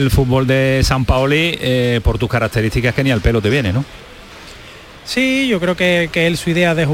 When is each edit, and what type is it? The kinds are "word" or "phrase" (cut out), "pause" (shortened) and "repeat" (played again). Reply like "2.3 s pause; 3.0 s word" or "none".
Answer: none